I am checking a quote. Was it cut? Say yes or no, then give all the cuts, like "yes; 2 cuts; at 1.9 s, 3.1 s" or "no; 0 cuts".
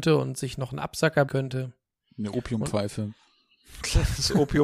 yes; 1 cut; at 1.3 s